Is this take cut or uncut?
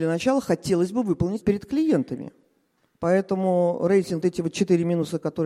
cut